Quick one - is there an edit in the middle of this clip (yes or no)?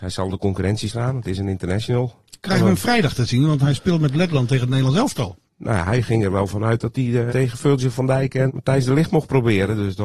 yes